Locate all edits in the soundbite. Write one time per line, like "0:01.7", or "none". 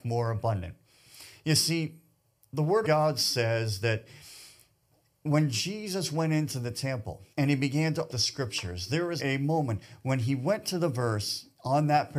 0:02.8
0:07.3
0:08.1
0:09.2